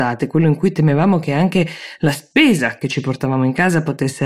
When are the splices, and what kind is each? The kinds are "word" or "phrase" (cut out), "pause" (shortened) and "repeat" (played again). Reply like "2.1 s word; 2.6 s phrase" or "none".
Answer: none